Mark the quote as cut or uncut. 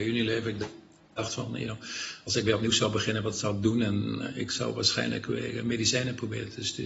uncut